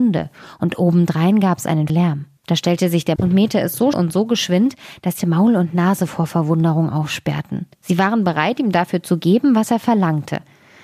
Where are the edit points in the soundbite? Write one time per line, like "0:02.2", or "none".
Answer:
0:01.9
0:02.4
0:03.2
0:03.9
0:05.2
0:07.7